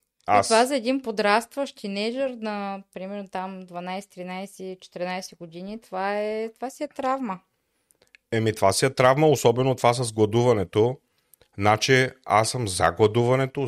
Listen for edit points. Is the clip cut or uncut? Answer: uncut